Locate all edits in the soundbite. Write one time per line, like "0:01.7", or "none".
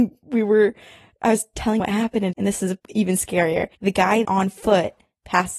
0:01.8
0:02.3
0:02.8
0:03.7
0:04.2